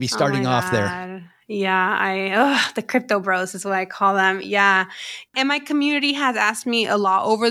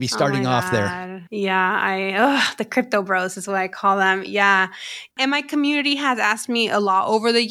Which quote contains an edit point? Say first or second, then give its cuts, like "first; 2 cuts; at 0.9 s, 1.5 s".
second; 1 cut; at 1.3 s